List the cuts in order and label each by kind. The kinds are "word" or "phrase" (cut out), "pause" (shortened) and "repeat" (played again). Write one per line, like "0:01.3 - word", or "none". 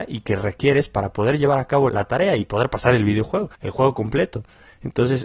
0:01.9 - word
0:03.5 - pause